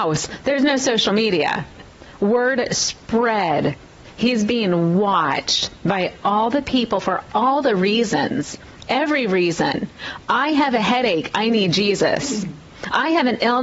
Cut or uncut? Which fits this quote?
uncut